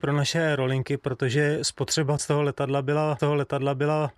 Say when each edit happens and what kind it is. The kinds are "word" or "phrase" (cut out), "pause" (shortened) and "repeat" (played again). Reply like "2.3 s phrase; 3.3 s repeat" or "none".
2.2 s word; 3.2 s repeat